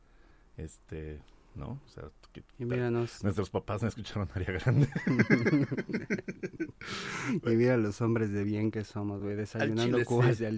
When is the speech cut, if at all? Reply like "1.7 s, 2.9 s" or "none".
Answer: none